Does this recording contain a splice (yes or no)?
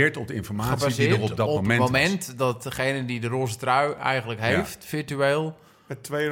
no